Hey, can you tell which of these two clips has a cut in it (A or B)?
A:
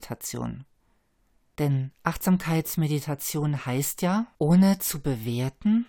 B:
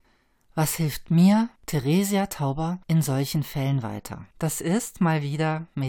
B